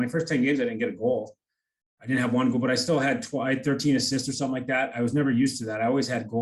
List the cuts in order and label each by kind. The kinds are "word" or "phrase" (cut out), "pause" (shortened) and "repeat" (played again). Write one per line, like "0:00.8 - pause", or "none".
none

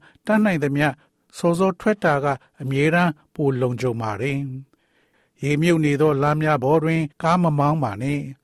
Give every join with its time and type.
0:07.1 - pause

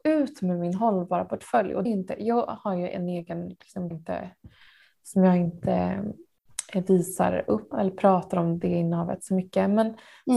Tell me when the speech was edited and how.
0:01.9 - phrase
0:03.9 - phrase
0:07.7 - word

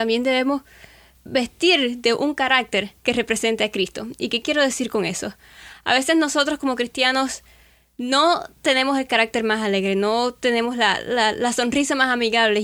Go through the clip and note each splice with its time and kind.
0:01.1 - word
0:03.0 - pause

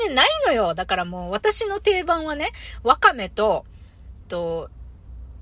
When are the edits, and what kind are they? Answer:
0:04.2 - phrase

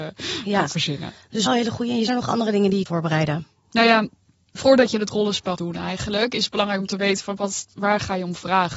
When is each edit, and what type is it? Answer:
0:01.5 - word
0:02.1 - word
0:02.9 - word
0:04.6 - word
0:05.6 - word
0:07.4 - word

